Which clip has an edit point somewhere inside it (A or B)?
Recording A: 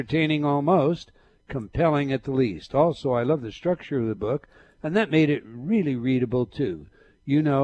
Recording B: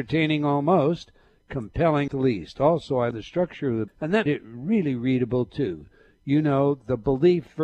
B